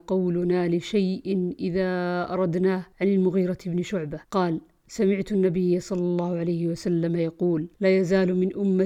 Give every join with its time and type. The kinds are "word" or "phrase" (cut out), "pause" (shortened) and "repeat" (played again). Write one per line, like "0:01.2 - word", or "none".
0:02.9 - pause
0:04.2 - pause
0:07.7 - pause

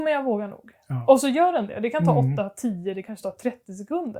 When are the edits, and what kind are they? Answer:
0:03.0 - word

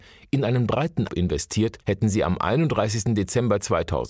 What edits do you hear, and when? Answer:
0:01.1 - word
0:01.8 - pause

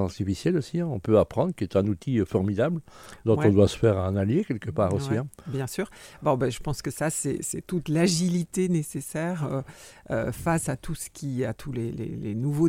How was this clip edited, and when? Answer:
none

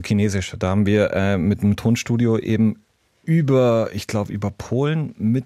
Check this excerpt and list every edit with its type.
none

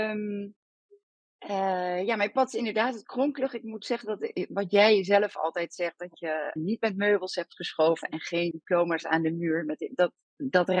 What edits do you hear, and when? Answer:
0:06.6 - word
0:08.5 - word

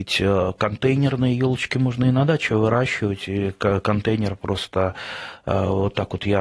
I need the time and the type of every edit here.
none

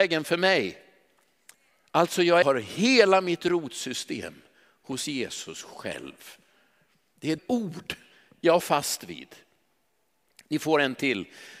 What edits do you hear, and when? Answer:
0:02.4 - phrase
0:07.4 - word
0:08.6 - word

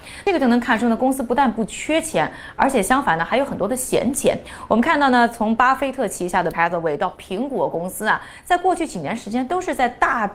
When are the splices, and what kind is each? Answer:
0:06.5 - word

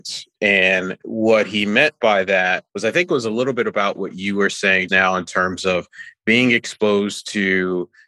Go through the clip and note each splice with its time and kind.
0:02.7 - pause
0:04.9 - word

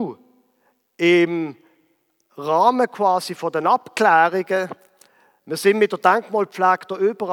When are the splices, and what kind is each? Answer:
none

